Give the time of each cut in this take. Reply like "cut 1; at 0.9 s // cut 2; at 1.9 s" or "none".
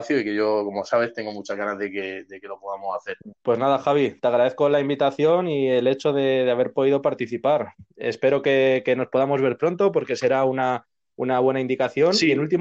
cut 1; at 3.3 s